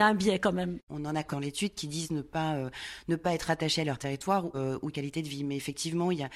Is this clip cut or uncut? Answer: cut